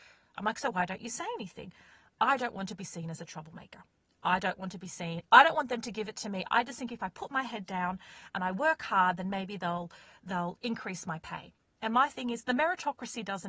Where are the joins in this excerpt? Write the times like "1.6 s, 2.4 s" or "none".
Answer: none

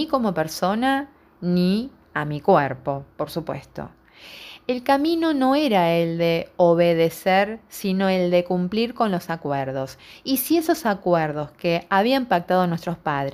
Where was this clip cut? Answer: none

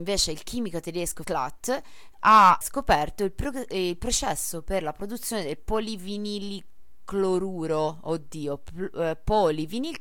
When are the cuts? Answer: 1.2 s, 2.6 s

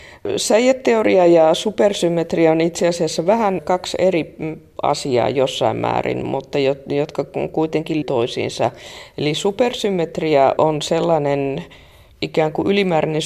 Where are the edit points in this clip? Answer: 8.0 s, 10.6 s

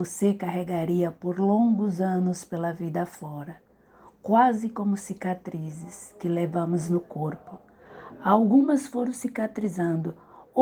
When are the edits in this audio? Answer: none

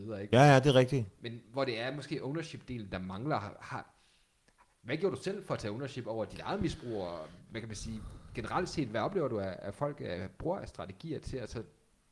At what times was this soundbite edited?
none

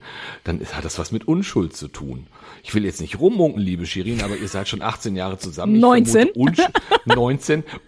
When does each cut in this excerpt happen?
none

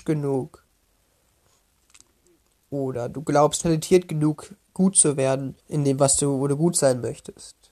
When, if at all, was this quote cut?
3.6 s, 5.6 s

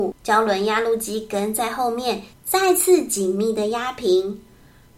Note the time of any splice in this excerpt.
2.3 s

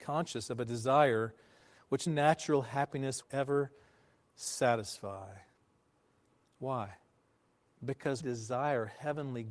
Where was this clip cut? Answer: 2.1 s, 3.2 s, 8.2 s

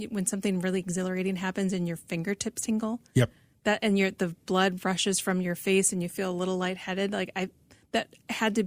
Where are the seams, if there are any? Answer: none

